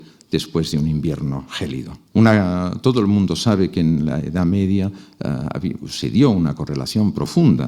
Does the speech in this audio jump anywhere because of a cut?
yes; 1 cut; at 2.1 s

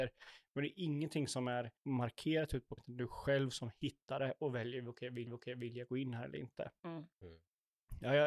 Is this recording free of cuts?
no; 4 cuts; at 1.8 s, 2.8 s, 5.3 s, 7.1 s

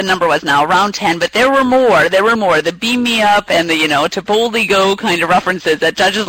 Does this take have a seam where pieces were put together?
yes; 1 cut; at 2.4 s

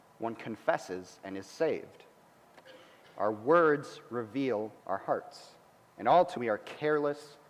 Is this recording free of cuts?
no; 4 cuts; at 3.0 s, 4.8 s, 5.8 s, 6.4 s

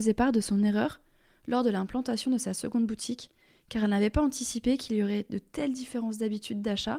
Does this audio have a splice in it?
no; 0 cuts

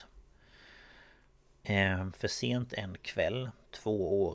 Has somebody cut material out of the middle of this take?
no; 0 cuts

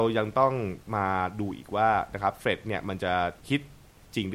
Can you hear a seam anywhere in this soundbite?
yes; 1 cut; at 3.4 s

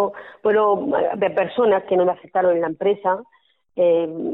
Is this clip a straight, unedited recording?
yes; 0 cuts

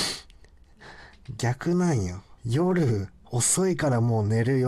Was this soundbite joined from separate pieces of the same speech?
yes; 1 cut; at 2.4 s

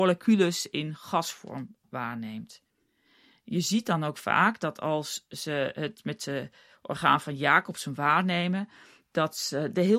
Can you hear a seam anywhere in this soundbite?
no; 0 cuts

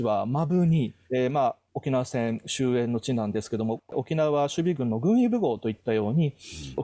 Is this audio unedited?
no; 1 cut; at 1.1 s

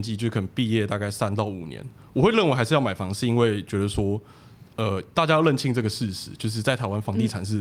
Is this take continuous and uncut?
yes; 0 cuts

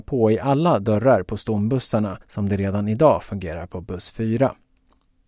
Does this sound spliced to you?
yes; 1 cut; at 2.2 s

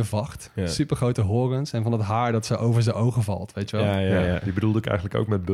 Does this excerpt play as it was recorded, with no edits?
yes; 0 cuts

